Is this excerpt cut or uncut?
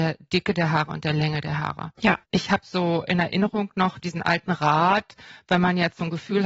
cut